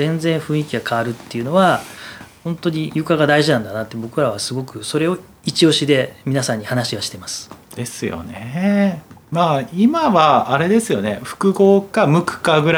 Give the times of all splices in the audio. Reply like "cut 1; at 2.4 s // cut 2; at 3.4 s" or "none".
none